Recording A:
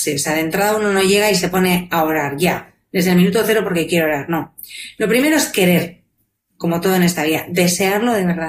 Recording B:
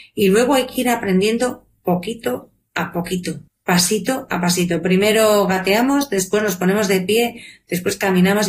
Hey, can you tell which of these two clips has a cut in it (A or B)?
B